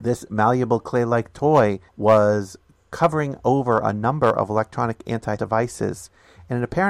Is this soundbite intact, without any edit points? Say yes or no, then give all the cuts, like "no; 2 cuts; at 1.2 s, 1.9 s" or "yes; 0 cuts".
no; 2 cuts; at 1.9 s, 5.4 s